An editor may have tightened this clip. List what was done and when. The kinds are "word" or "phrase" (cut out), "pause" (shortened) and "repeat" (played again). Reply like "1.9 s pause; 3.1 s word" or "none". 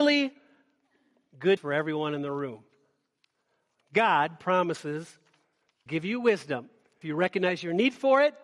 1.6 s word; 5.9 s word; 7.0 s word